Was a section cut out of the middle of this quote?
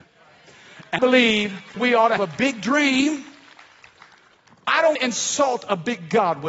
yes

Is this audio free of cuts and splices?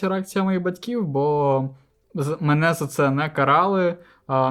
yes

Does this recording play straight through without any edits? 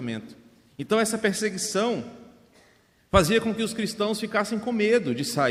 yes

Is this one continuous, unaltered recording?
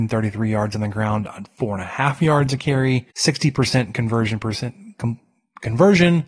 no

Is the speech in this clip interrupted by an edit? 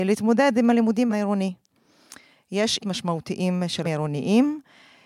yes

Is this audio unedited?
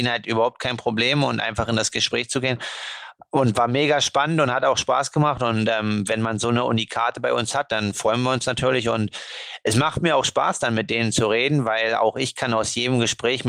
yes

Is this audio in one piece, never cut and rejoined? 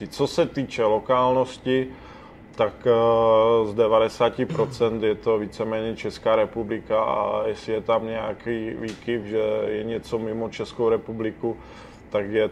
yes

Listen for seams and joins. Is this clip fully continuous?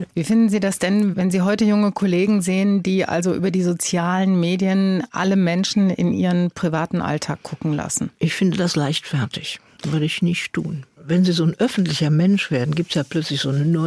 no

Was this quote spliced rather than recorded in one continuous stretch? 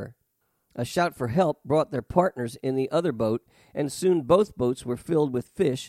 no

